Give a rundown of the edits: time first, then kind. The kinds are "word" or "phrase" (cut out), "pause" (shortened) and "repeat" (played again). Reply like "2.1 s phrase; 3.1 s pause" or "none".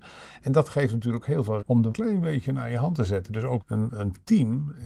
1.2 s word; 1.6 s word; 1.9 s phrase; 3.6 s word; 3.9 s word